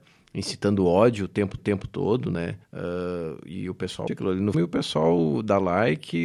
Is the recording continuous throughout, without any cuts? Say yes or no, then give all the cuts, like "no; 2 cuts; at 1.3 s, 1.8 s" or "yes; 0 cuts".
no; 4 cuts; at 1.6 s, 2.6 s, 4.1 s, 4.5 s